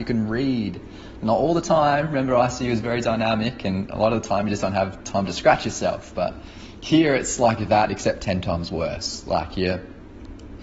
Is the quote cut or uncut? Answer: uncut